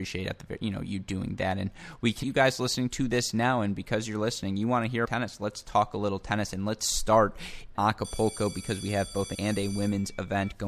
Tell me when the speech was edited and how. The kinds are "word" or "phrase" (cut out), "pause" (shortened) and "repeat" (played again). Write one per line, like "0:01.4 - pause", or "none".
0:02.2 - word
0:05.0 - word
0:07.7 - word
0:09.3 - word